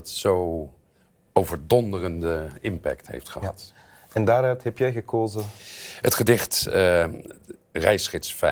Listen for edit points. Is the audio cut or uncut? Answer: uncut